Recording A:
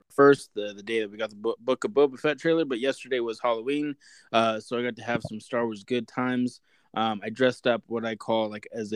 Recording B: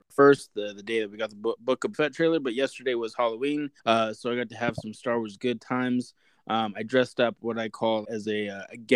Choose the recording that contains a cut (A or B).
B